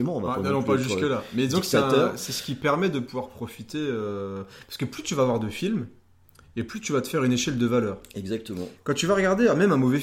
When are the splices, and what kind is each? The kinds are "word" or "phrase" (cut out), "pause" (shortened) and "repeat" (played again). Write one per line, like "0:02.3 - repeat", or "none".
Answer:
none